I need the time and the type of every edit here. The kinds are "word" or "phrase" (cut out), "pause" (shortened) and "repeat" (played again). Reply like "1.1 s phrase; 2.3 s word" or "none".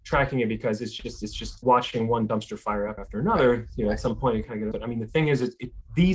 1.6 s word; 3.0 s word; 4.7 s phrase